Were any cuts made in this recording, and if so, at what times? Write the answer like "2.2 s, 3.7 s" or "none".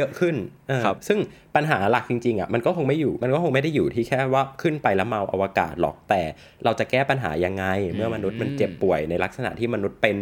none